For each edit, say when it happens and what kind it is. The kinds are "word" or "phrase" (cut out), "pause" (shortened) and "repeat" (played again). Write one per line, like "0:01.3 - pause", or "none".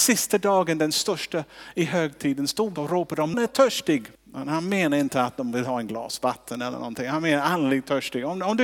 0:02.8 - word
0:03.3 - word
0:04.1 - pause